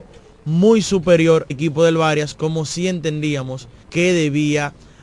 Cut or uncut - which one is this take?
cut